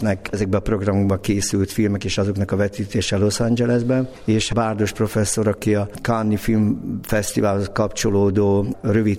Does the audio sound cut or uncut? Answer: uncut